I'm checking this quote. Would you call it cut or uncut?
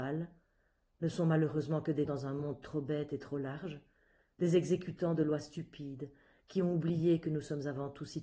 cut